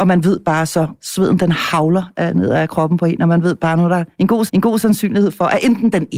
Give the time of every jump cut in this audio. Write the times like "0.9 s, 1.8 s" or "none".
4.5 s